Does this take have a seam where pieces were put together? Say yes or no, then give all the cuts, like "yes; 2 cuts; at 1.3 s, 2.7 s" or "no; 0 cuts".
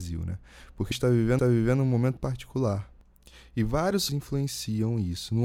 yes; 4 cuts; at 0.9 s, 1.4 s, 2.2 s, 4.1 s